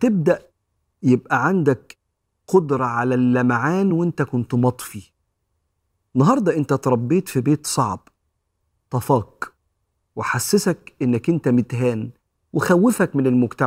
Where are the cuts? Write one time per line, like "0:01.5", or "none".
none